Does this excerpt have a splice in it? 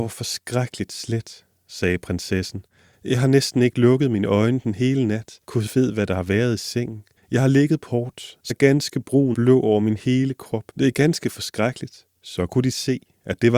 yes; 7 cuts; at 5.4 s, 7.2 s, 7.9 s, 8.5 s, 9.3 s, 10.7 s, 12.2 s

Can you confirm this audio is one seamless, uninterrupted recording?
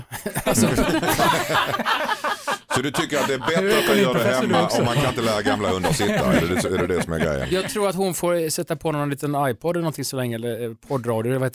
yes; 0 cuts

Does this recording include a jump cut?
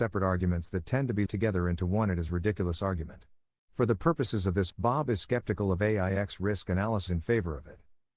yes; 3 cuts; at 1.3 s, 4.7 s, 7.1 s

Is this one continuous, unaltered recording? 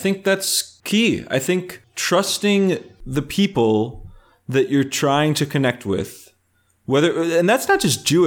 yes; 0 cuts

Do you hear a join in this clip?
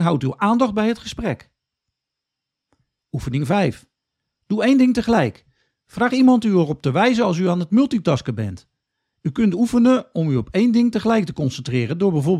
no; 0 cuts

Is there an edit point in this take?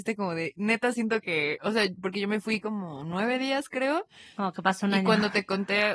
no; 0 cuts

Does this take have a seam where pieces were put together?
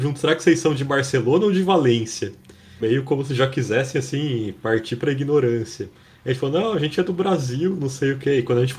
no; 0 cuts

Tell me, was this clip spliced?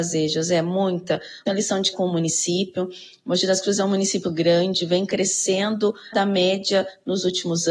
yes; 4 cuts; at 1.5 s, 1.9 s, 4.2 s, 6.1 s

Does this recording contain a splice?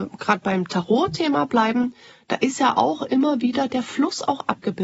no; 0 cuts

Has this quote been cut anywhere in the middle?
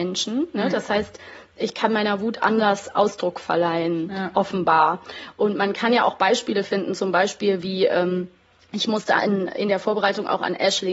no; 0 cuts

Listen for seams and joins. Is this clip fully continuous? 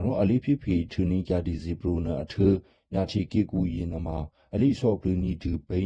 yes; 0 cuts

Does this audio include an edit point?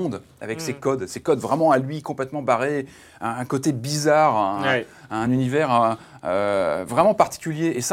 no; 0 cuts

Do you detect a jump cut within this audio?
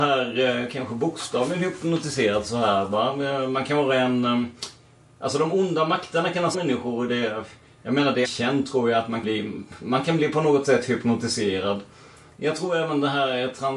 yes; 3 cuts; at 6.5 s, 8.2 s, 9.2 s

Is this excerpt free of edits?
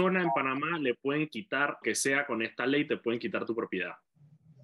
no; 1 cut; at 1.8 s

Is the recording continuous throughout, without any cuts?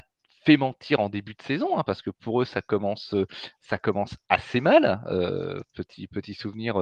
yes; 0 cuts

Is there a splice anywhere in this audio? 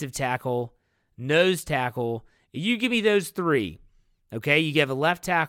no; 0 cuts

